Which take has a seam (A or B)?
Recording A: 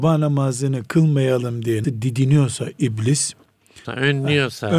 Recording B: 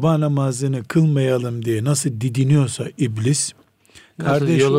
A